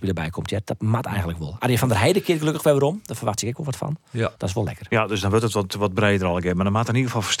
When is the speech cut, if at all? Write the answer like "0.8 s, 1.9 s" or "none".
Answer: 4.4 s